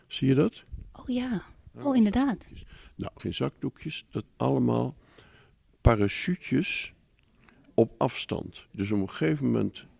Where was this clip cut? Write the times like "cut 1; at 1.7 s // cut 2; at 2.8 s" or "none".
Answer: cut 1; at 3.2 s // cut 2; at 4.3 s // cut 3; at 7.7 s // cut 4; at 8.7 s